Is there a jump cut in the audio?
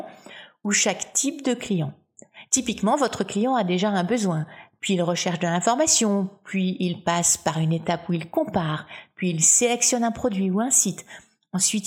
no; 0 cuts

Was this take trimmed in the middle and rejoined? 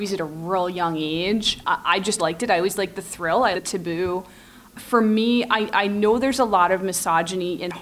yes; 2 cuts; at 2.2 s, 3.5 s

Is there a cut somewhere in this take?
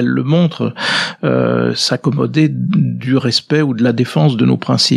no; 0 cuts

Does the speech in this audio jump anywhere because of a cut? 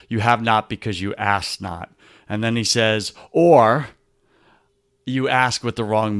no; 0 cuts

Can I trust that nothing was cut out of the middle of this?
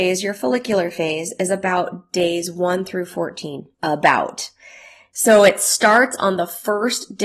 no; 1 cut; at 3.7 s

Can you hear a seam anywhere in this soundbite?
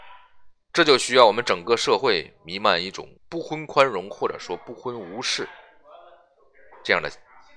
yes; 1 cut; at 3.2 s

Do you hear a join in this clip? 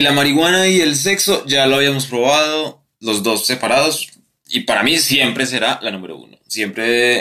no; 0 cuts

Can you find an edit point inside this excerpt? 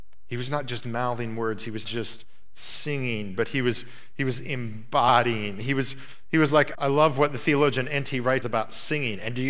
yes; 3 cuts; at 1.8 s, 6.7 s, 8.4 s

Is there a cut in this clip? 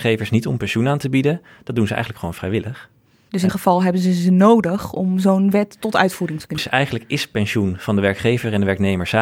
yes; 2 cuts; at 3.5 s, 6.6 s

